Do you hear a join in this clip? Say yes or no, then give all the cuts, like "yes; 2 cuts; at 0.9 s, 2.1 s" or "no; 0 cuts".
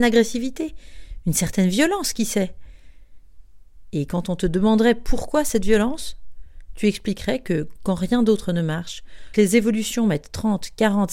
yes; 1 cut; at 9.3 s